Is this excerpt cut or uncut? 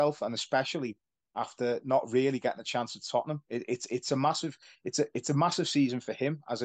uncut